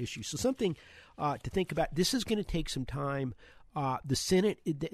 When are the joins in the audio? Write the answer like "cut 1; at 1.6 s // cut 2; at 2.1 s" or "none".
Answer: none

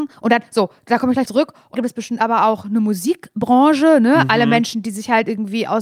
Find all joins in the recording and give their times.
cut 1; at 1.2 s // cut 2; at 1.7 s

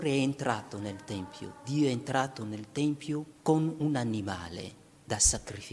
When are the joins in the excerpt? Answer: cut 1; at 3.3 s

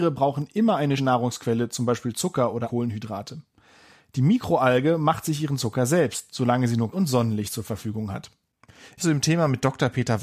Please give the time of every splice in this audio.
cut 1; at 1.0 s // cut 2; at 2.6 s // cut 3; at 6.9 s // cut 4; at 9.0 s

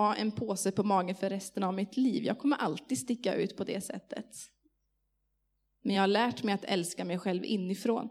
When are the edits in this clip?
none

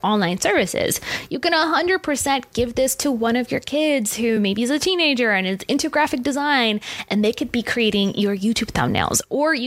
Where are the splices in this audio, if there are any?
none

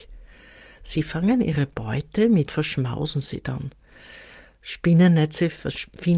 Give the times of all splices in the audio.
cut 1; at 2.5 s

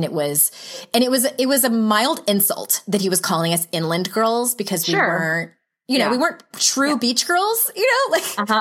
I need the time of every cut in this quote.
none

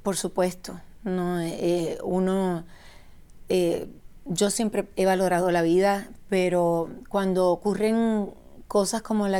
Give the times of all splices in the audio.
none

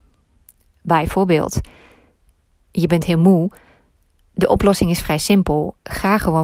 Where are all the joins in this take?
none

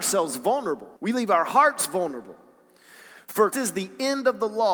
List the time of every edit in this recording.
cut 1; at 1.0 s // cut 2; at 3.5 s

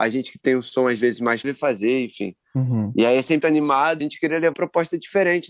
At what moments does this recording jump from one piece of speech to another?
cut 1; at 1.4 s // cut 2; at 3.4 s // cut 3; at 4.0 s // cut 4; at 4.5 s

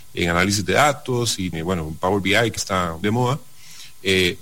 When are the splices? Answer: cut 1; at 1.5 s // cut 2; at 2.6 s // cut 3; at 3.0 s

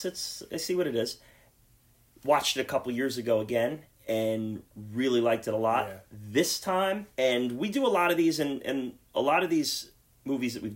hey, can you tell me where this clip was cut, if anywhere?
none

